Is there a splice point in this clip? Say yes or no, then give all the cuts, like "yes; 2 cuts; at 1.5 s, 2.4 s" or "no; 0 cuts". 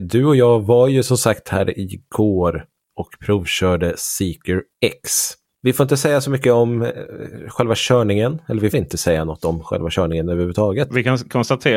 yes; 1 cut; at 8.7 s